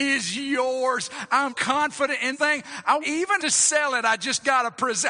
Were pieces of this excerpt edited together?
yes; 4 cuts; at 1.5 s, 2.3 s, 3.0 s, 3.4 s

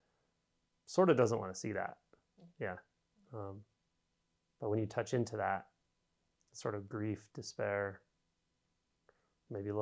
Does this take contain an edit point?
yes; 1 cut; at 2.5 s

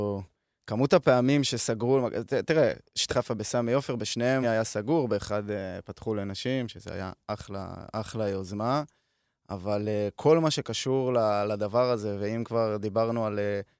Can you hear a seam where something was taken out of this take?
yes; 2 cuts; at 3.1 s, 4.4 s

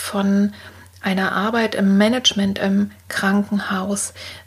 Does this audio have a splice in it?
no; 0 cuts

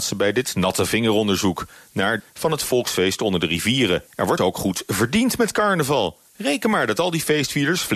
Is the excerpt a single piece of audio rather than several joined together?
no; 4 cuts; at 2.2 s, 4.1 s, 4.4 s, 6.3 s

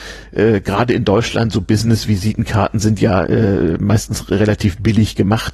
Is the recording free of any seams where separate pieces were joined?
yes; 0 cuts

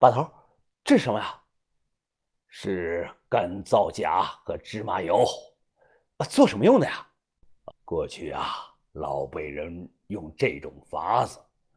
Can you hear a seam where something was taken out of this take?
yes; 1 cut; at 7.7 s

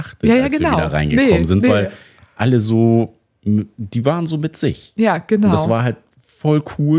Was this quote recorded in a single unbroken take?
yes; 0 cuts

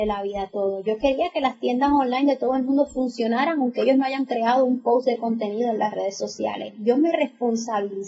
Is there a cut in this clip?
no; 0 cuts

